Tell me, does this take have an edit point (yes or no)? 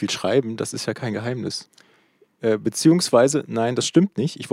no